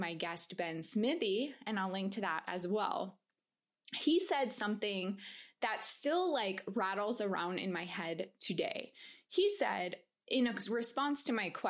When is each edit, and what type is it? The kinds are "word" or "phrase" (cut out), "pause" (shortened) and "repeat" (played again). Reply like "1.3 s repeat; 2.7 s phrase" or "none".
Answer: none

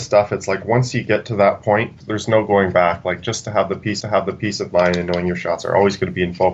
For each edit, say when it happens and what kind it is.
2.0 s word; 4.0 s repeat

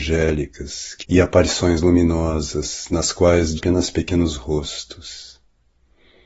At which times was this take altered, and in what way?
1.0 s word; 3.6 s word

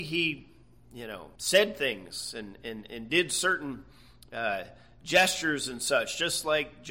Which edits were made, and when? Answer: 1.3 s pause

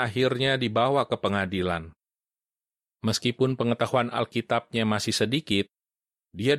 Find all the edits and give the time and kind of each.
none

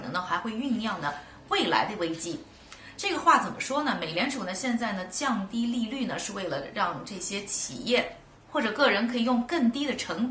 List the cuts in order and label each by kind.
8.4 s pause

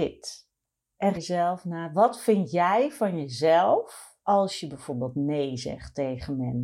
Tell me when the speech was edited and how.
1.1 s phrase; 4.2 s pause

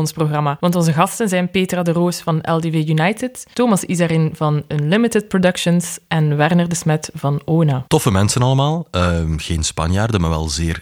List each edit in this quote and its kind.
7.9 s pause

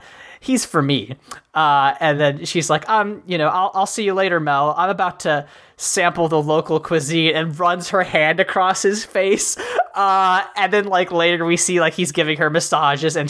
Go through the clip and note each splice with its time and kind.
none

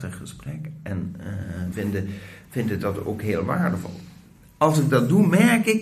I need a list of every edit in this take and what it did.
1.7 s word

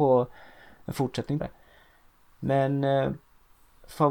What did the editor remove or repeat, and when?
1.4 s word

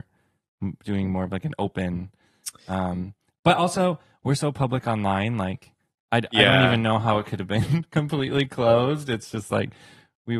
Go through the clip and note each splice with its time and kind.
none

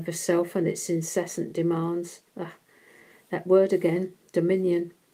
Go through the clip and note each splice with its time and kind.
2.3 s pause

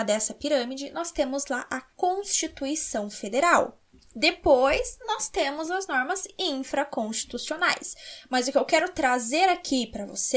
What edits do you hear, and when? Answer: none

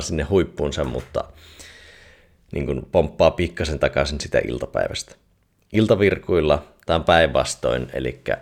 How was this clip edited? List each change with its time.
none

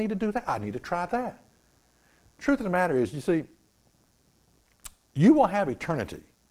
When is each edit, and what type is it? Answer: none

